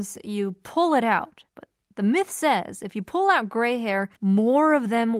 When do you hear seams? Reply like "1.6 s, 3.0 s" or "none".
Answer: 1.5 s, 4.2 s